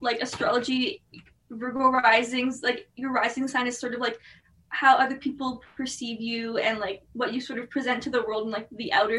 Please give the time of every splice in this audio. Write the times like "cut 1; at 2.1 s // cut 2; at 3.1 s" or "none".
none